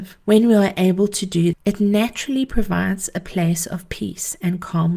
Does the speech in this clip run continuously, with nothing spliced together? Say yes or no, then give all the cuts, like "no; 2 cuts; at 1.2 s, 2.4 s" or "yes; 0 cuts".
no; 1 cut; at 1.5 s